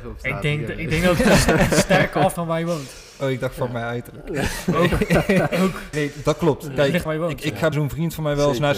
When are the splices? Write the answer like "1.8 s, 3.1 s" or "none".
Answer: 2.4 s, 5.9 s, 7.1 s, 7.7 s